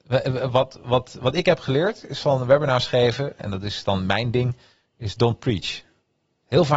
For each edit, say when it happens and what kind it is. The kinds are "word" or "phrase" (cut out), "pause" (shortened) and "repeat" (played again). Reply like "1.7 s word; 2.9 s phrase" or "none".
none